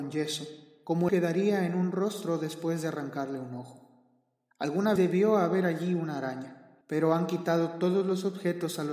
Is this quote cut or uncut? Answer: cut